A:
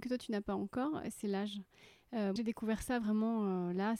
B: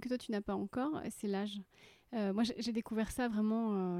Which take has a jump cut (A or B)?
A